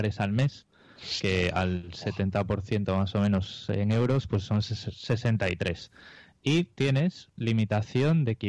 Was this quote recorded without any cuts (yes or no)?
yes